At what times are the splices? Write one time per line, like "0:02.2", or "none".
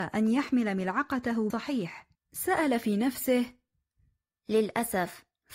0:01.5
0:02.1